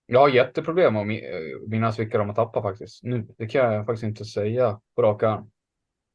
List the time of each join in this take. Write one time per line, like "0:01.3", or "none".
0:03.3
0:04.9